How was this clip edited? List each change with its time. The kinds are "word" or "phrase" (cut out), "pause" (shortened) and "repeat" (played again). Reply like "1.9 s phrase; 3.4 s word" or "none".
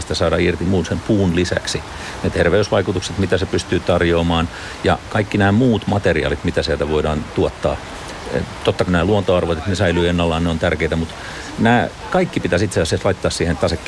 8.9 s phrase